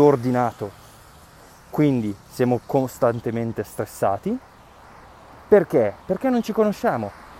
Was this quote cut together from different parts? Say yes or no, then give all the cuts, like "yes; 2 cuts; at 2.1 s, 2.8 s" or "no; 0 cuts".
yes; 2 cuts; at 2.2 s, 6.0 s